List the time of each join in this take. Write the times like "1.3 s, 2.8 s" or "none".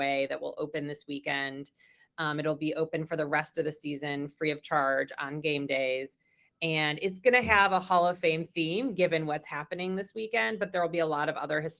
none